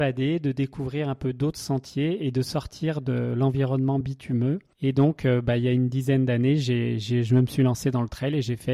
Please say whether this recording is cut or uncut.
uncut